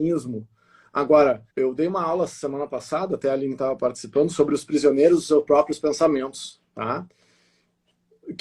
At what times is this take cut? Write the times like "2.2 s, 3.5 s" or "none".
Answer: 1.5 s